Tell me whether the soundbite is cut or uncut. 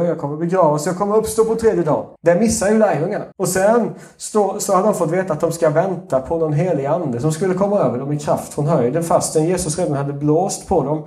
cut